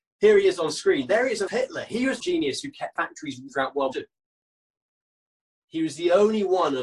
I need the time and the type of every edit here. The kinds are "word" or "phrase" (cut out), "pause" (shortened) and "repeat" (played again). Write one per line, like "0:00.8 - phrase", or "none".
0:01.5 - word
0:02.2 - phrase
0:02.9 - phrase
0:03.5 - word
0:03.9 - word